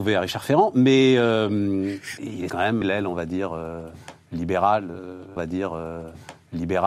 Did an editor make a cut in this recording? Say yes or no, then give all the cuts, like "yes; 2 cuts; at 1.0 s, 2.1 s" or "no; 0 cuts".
yes; 4 cuts; at 2.2 s, 2.5 s, 2.8 s, 5.4 s